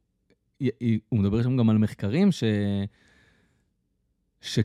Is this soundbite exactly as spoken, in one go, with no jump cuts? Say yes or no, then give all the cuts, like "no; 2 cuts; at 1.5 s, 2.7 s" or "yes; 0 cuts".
yes; 0 cuts